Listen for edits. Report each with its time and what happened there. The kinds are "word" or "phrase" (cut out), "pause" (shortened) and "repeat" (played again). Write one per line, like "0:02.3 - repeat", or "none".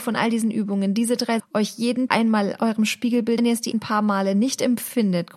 0:01.4 - word
0:02.1 - word
0:03.4 - phrase
0:03.7 - word